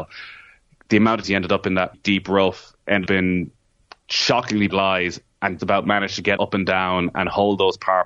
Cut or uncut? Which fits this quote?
cut